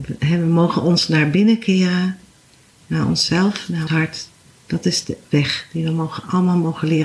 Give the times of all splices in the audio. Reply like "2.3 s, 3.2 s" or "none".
3.9 s, 5.2 s

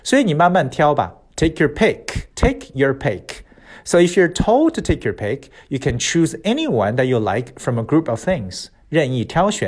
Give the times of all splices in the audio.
2.3 s

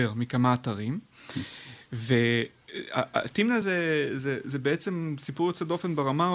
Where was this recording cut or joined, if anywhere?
none

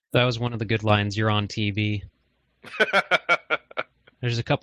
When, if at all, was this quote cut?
none

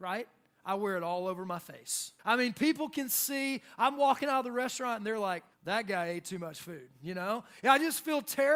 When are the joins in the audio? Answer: 2.2 s, 5.5 s

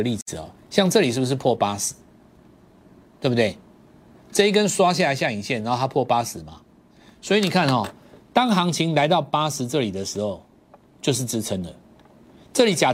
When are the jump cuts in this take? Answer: none

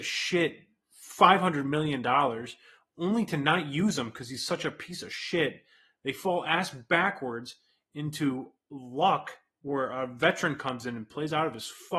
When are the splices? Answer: none

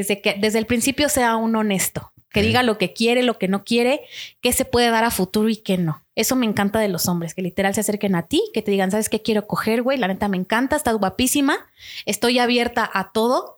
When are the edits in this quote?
6.1 s

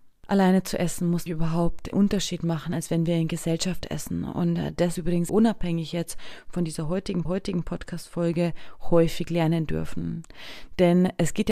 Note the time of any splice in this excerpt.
1.3 s, 1.9 s, 5.0 s, 5.3 s, 7.3 s

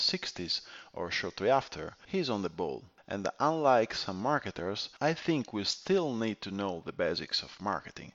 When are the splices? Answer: none

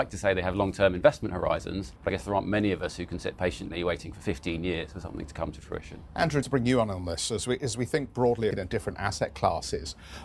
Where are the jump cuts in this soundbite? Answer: 2.0 s, 6.4 s, 8.5 s

